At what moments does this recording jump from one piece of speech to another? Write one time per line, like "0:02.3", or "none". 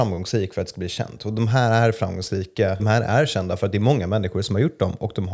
0:02.8